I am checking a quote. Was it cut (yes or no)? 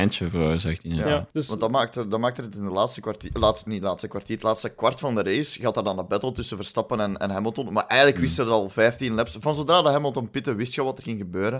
yes